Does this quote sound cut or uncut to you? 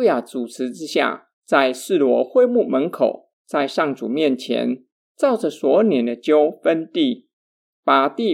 cut